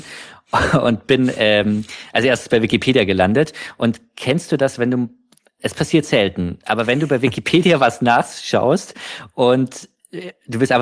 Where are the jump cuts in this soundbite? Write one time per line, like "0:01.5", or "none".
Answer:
none